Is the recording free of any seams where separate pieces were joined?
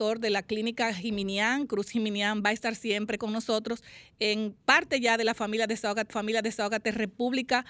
no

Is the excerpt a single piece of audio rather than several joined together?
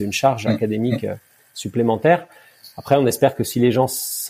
yes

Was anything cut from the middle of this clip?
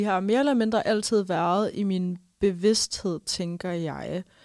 no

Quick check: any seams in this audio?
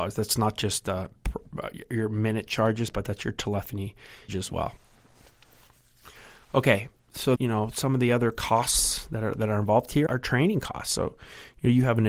yes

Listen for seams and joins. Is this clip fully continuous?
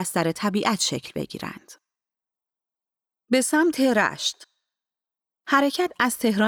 yes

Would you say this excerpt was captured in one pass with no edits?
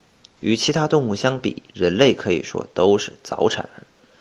no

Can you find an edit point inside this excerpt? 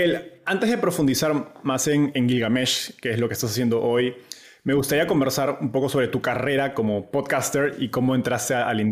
no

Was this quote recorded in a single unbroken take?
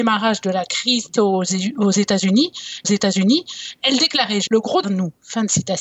no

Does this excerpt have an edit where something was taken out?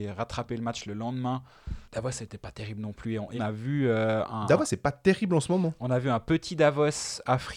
yes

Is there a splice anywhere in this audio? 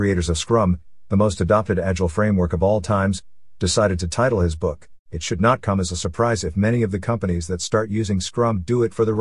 yes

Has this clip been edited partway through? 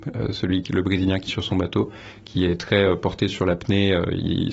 yes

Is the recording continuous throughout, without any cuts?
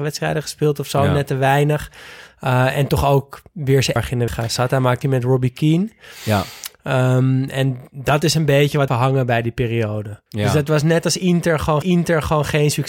no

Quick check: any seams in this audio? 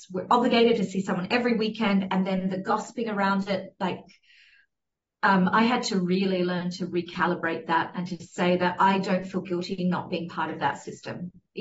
no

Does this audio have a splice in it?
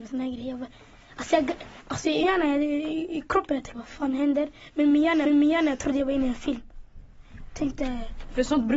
yes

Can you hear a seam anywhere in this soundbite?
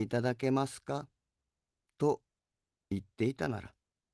no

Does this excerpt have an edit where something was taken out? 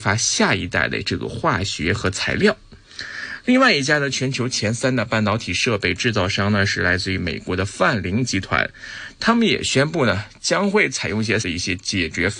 yes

